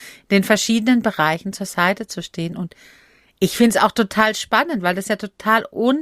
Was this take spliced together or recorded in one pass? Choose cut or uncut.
uncut